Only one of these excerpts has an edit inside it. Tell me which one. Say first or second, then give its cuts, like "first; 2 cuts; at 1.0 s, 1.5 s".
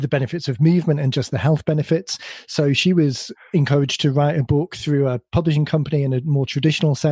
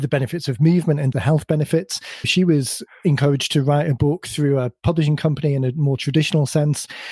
second; 2 cuts; at 1.1 s, 2.2 s